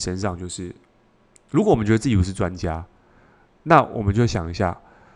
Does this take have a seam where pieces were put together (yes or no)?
no